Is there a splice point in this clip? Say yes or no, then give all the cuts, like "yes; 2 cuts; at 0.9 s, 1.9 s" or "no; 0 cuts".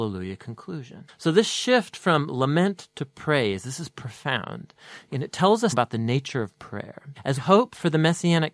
yes; 2 cuts; at 5.7 s, 7.4 s